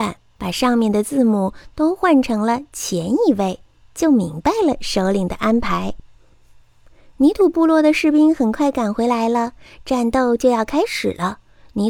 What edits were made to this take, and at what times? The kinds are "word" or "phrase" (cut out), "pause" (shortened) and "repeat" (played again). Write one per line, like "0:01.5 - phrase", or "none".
none